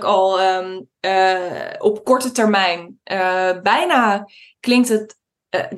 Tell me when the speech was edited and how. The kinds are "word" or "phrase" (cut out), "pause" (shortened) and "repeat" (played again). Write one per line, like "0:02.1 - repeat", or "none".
none